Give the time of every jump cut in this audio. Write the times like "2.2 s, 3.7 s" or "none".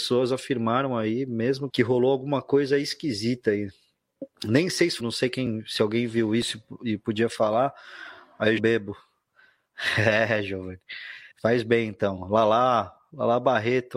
1.7 s, 4.3 s, 5.0 s, 8.6 s, 11.3 s